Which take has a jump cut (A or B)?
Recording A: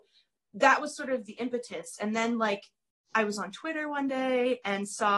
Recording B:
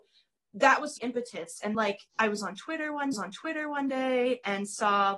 B